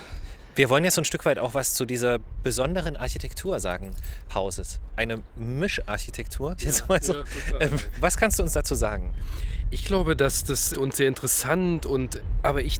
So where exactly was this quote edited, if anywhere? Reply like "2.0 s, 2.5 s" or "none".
4.3 s, 6.6 s, 10.7 s

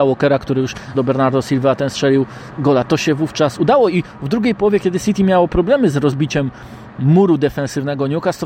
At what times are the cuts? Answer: 0.9 s, 2.6 s

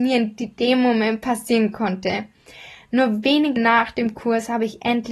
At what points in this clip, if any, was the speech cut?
3.6 s

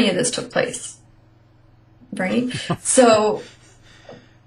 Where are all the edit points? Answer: none

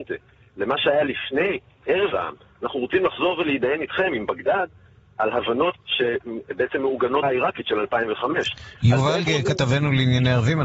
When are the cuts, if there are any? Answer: 2.1 s, 5.8 s, 7.2 s, 9.3 s

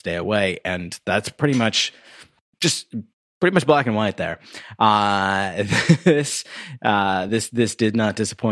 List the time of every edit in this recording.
none

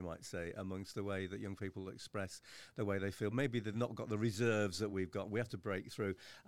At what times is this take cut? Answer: none

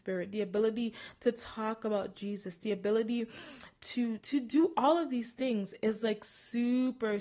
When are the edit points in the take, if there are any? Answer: 4.2 s

